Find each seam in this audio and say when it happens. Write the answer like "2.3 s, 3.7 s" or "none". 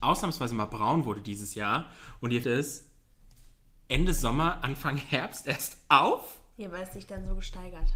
2.4 s